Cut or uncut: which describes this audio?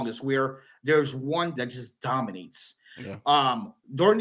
cut